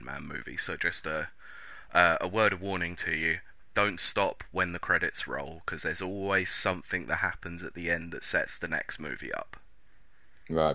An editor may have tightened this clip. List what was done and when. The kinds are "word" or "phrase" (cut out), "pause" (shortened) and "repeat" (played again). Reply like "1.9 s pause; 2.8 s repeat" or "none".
none